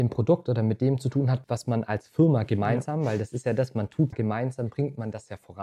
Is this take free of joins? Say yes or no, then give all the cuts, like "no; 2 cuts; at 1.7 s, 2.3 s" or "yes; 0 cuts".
no; 2 cuts; at 1.4 s, 4.1 s